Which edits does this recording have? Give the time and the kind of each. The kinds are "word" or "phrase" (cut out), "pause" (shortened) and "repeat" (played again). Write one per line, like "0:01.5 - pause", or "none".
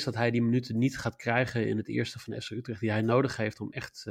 none